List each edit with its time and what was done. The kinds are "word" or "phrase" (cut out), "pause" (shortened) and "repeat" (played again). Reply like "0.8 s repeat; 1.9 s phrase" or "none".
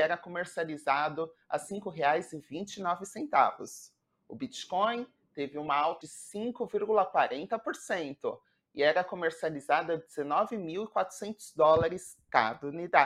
6.0 s word